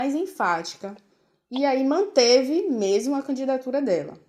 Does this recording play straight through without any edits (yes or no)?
yes